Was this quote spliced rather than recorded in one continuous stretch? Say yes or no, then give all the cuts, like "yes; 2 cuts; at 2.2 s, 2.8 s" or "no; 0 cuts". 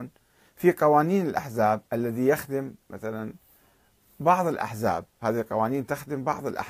yes; 1 cut; at 1.9 s